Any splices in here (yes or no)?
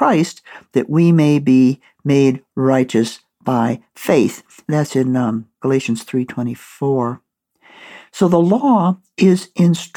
no